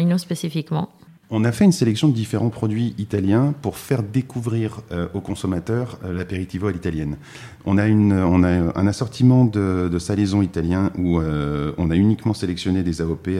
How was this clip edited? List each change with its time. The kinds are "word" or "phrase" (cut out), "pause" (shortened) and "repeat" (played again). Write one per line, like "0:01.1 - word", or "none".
none